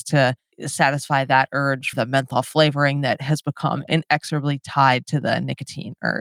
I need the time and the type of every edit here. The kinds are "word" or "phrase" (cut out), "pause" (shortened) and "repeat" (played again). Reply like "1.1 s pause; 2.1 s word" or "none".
1.9 s word